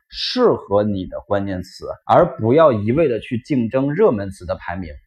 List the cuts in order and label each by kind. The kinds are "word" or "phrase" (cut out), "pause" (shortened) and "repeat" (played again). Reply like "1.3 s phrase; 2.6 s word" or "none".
2.0 s pause